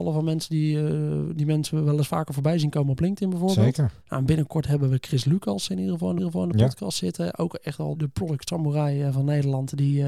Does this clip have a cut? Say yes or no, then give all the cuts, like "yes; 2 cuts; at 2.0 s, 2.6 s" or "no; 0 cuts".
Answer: yes; 3 cuts; at 4.0 s, 6.2 s, 7.9 s